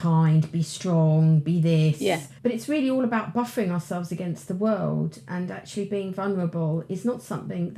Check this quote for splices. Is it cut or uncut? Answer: cut